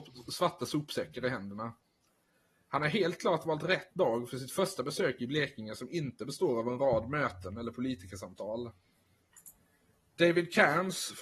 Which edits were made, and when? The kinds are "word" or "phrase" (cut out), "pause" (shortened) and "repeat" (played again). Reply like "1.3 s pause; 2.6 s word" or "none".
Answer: none